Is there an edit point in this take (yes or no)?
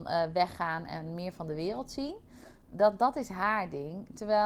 no